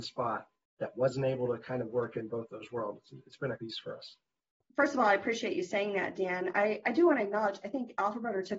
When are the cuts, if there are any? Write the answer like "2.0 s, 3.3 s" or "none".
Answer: 3.6 s